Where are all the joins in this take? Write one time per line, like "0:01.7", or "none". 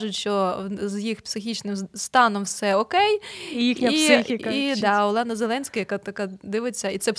none